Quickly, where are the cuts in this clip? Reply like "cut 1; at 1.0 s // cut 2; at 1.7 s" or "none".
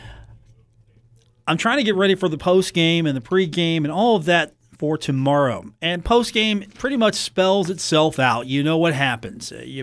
none